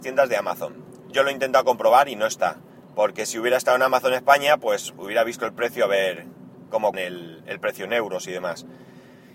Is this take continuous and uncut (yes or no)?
no